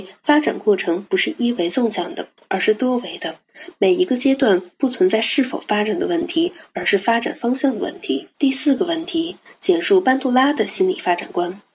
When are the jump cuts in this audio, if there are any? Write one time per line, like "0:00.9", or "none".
0:08.3